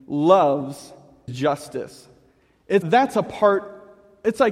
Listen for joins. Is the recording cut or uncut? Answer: cut